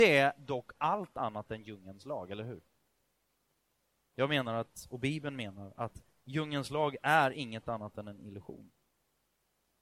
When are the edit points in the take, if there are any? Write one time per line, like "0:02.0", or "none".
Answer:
none